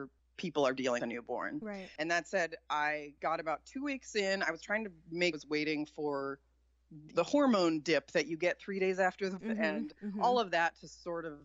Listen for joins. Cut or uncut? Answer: cut